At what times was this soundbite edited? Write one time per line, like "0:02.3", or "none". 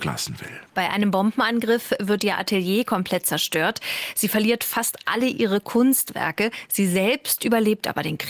none